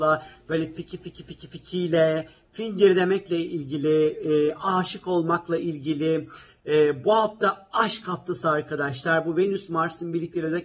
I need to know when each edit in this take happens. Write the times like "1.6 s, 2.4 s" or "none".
none